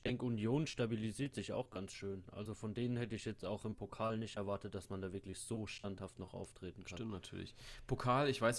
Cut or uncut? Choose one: uncut